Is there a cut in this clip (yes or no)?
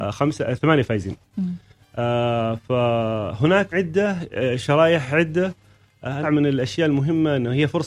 yes